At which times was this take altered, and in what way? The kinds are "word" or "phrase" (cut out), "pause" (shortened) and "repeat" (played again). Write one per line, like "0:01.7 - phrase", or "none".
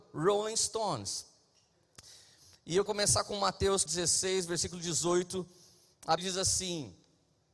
0:02.9 - word
0:03.9 - word
0:06.2 - word